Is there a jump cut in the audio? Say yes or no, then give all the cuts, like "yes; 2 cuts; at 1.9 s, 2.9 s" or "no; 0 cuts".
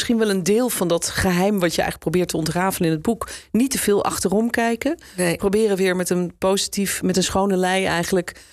no; 0 cuts